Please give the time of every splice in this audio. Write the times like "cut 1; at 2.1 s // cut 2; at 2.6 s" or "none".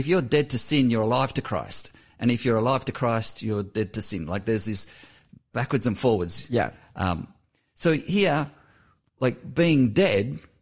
none